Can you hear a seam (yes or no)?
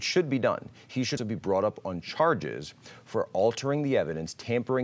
yes